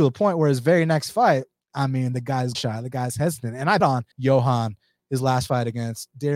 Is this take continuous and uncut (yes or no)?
no